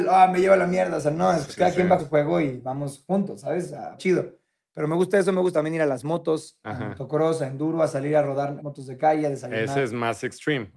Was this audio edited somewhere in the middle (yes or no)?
yes